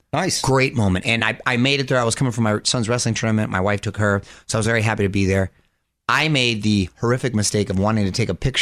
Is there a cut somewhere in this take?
no; 0 cuts

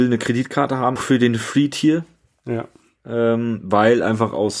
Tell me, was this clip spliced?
yes; 1 cut; at 1.0 s

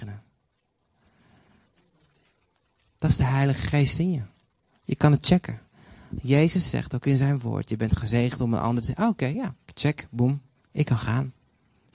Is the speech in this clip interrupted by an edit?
no; 0 cuts

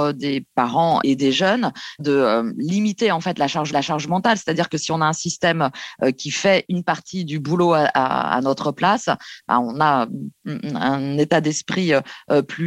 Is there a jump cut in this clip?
yes; 1 cut; at 3.7 s

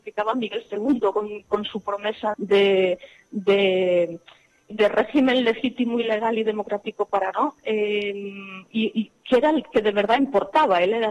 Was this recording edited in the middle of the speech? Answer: yes; 3 cuts; at 2.3 s, 4.7 s, 7.3 s

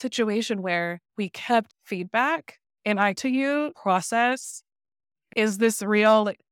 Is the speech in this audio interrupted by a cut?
yes; 5 cuts; at 1.1 s, 1.7 s, 2.6 s, 3.1 s, 3.7 s

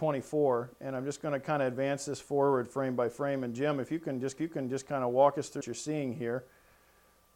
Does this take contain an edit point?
yes; 2 cuts; at 4.4 s, 5.6 s

